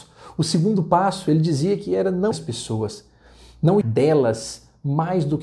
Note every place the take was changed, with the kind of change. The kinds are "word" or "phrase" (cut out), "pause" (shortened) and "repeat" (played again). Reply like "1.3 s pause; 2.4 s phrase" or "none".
2.3 s word; 3.8 s word